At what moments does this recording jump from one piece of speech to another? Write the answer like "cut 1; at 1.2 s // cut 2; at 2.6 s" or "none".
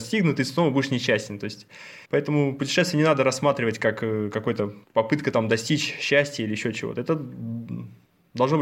cut 1; at 2.0 s // cut 2; at 4.8 s